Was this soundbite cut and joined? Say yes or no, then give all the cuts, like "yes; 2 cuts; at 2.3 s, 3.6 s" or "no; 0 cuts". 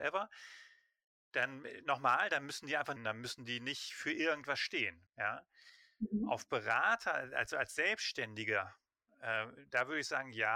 yes; 2 cuts; at 3.0 s, 5.1 s